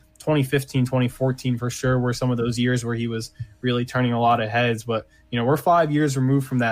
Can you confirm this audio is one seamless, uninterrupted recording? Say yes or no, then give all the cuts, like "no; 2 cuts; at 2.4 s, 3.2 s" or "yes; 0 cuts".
yes; 0 cuts